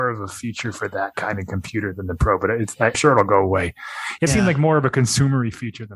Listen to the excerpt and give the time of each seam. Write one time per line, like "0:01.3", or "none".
0:02.9
0:04.3